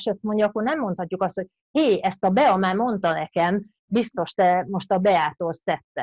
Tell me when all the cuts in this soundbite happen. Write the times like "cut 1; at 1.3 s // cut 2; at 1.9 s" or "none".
none